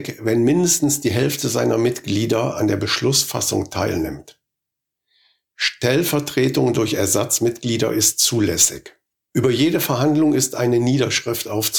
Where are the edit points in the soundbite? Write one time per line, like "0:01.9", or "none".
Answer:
none